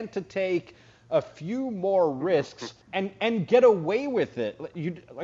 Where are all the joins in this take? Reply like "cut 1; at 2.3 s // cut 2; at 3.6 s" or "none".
cut 1; at 2.8 s